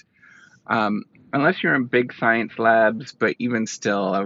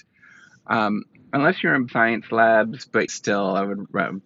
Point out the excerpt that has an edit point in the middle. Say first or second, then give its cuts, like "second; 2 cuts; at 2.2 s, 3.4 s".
second; 2 cuts; at 1.9 s, 3.1 s